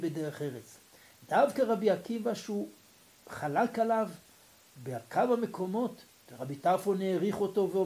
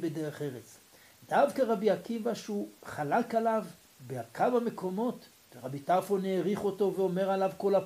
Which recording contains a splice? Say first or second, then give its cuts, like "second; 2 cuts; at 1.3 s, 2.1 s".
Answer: second; 2 cuts; at 2.8 s, 3.8 s